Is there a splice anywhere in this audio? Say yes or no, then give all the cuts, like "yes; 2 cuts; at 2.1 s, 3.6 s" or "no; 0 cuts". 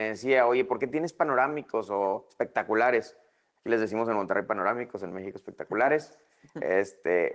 no; 0 cuts